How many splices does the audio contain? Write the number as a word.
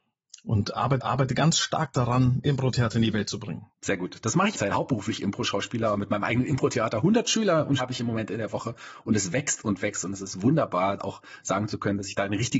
five